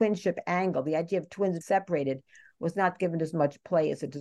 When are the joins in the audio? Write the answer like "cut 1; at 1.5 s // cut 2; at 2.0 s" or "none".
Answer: cut 1; at 1.6 s